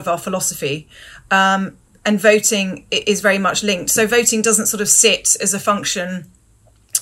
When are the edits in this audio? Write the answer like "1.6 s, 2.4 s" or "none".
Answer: none